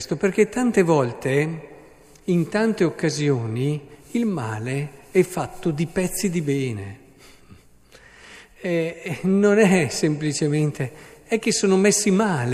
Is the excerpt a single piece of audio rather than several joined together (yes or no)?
yes